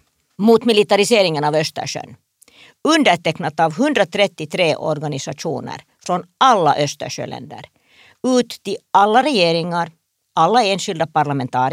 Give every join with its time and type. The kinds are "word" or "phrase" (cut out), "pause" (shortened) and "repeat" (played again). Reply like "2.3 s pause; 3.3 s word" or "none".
none